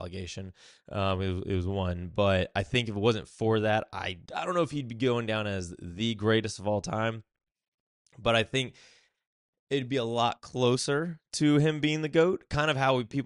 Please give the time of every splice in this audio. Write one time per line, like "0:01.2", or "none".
0:04.2